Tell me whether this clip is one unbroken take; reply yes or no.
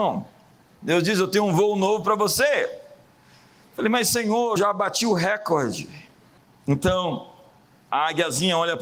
no